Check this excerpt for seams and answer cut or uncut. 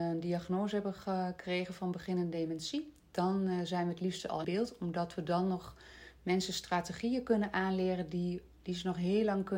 cut